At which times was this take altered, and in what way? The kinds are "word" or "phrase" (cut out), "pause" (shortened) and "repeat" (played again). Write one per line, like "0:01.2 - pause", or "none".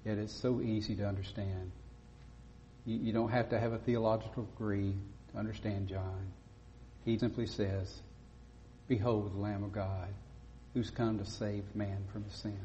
0:07.2 - word